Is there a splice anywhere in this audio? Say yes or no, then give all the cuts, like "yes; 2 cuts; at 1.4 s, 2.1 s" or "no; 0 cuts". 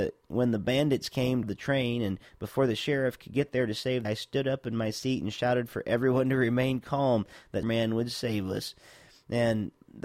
yes; 3 cuts; at 1.4 s, 4.0 s, 7.6 s